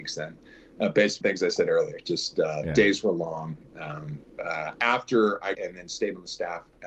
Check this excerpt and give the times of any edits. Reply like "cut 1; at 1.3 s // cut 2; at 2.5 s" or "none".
cut 1; at 1.2 s // cut 2; at 5.5 s